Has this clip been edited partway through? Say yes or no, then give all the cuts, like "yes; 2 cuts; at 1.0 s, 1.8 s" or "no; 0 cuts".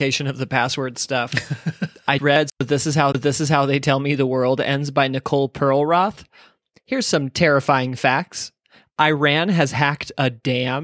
yes; 2 cuts; at 2.2 s, 3.1 s